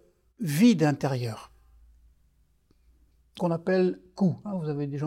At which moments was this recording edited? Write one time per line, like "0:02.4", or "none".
0:03.4